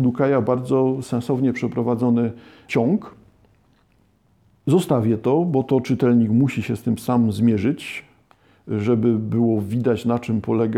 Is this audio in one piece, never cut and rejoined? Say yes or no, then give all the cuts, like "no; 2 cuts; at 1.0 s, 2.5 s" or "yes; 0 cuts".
yes; 0 cuts